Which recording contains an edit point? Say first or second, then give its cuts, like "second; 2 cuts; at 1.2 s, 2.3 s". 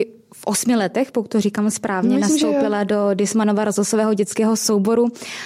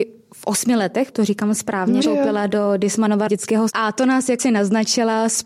second; 5 cuts; at 1.1 s, 2.0 s, 3.3 s, 3.7 s, 4.4 s